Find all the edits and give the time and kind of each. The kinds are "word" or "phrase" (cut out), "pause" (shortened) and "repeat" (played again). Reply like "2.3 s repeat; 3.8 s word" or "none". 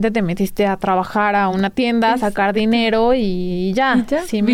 none